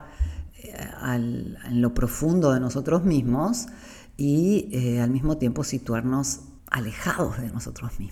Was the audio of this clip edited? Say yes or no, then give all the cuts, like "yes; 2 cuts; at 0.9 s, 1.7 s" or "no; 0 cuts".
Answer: yes; 1 cut; at 6.6 s